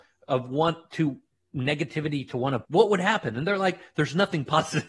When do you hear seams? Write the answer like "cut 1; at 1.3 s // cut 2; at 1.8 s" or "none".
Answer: cut 1; at 2.6 s